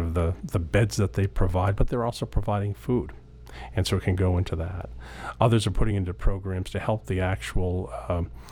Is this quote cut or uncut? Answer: uncut